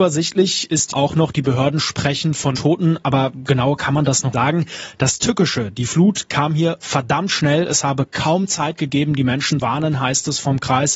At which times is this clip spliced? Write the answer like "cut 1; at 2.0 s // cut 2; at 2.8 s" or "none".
cut 1; at 0.9 s // cut 2; at 2.5 s // cut 3; at 4.3 s // cut 4; at 9.6 s